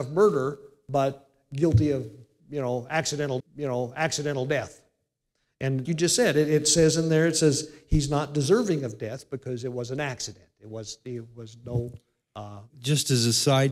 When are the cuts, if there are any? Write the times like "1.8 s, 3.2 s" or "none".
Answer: 3.4 s, 5.8 s, 12.7 s